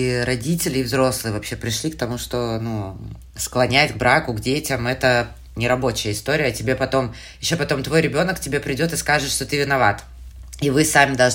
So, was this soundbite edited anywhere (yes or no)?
no